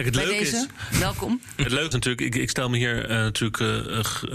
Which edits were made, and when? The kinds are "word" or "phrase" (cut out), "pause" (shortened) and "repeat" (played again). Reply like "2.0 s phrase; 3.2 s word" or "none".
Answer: 1.9 s word